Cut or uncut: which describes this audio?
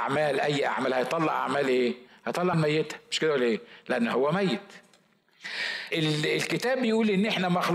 cut